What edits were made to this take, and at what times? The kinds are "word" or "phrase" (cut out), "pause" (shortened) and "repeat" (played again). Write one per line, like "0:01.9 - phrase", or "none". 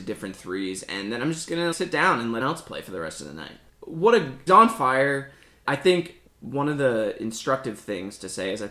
0:01.7 - word
0:02.4 - word
0:03.7 - word
0:04.5 - word
0:05.6 - word
0:06.3 - word